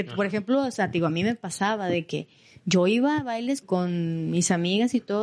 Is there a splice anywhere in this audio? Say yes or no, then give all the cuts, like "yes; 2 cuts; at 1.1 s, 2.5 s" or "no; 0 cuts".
yes; 1 cut; at 3.6 s